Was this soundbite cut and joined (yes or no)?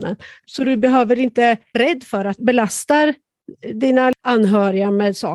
yes